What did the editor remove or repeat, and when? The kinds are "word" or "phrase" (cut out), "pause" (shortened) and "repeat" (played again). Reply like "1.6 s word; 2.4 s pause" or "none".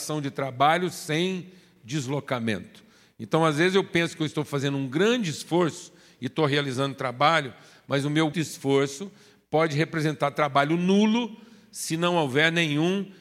8.3 s word